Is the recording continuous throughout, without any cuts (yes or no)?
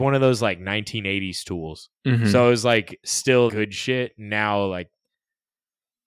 no